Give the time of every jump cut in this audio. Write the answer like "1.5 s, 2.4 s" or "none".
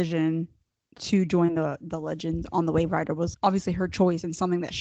3.3 s